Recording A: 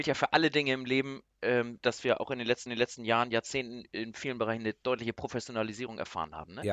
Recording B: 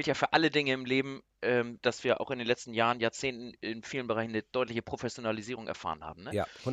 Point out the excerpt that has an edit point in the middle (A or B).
A